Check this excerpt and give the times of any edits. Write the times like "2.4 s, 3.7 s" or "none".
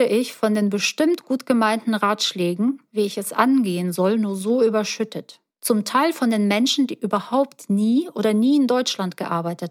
5.5 s